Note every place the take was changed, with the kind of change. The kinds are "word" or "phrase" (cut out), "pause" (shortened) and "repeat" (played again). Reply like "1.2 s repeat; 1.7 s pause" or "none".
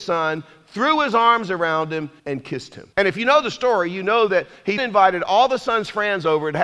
2.2 s pause; 2.9 s pause; 4.8 s word